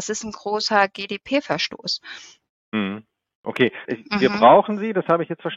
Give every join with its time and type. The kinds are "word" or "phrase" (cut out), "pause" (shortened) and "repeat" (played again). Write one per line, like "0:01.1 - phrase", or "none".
0:03.8 - word